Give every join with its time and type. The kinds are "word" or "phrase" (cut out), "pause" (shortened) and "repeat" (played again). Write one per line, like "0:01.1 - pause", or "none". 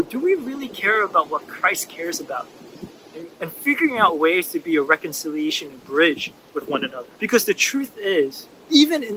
0:07.1 - pause